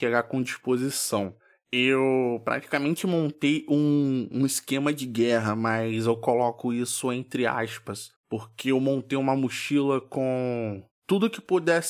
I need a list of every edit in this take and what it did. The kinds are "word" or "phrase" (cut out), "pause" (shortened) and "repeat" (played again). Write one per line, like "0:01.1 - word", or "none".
0:08.2 - pause